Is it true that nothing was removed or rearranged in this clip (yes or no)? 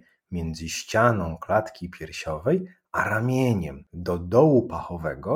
yes